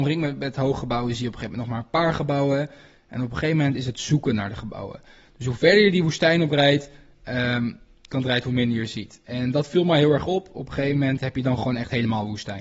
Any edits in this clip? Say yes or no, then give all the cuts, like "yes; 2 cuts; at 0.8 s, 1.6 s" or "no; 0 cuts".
no; 0 cuts